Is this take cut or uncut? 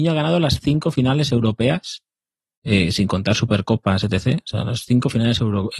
uncut